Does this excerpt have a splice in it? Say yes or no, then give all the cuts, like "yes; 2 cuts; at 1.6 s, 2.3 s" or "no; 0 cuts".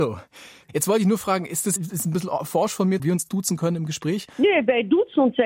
yes; 2 cuts; at 1.8 s, 3.0 s